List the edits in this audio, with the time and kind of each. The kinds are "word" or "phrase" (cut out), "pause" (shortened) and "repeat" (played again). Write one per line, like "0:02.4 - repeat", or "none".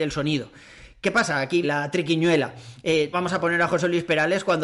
0:01.6 - word
0:03.1 - word

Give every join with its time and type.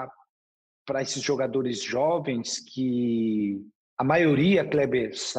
none

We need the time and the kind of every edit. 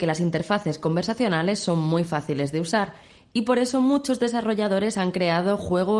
none

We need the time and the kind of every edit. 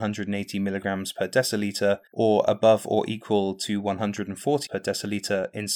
0:02.1 - pause
0:04.7 - word

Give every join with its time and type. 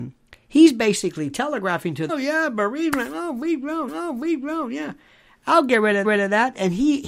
0:02.1 - phrase
0:03.9 - repeat
0:06.0 - repeat

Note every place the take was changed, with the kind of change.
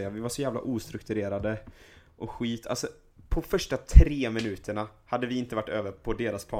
none

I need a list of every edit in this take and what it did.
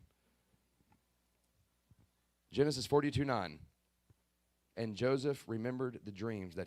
none

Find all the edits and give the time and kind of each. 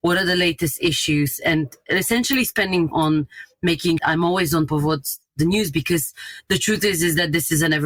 0:02.9 - word
0:04.0 - phrase
0:04.7 - word

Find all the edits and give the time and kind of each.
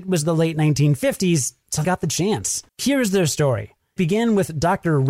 0:01.8 - word
0:02.7 - pause
0:04.0 - word

